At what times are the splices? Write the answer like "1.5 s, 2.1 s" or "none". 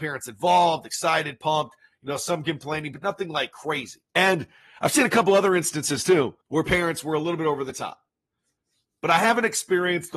4.1 s, 6.4 s